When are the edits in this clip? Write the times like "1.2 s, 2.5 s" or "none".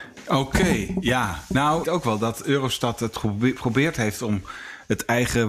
1.8 s